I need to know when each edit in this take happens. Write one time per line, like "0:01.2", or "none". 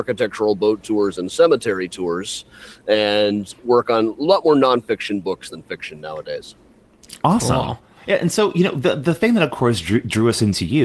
none